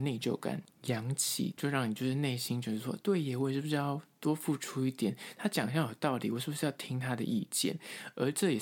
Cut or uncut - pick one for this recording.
cut